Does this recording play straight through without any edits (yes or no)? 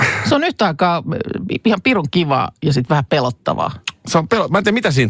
yes